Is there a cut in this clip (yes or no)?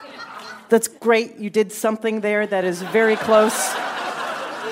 yes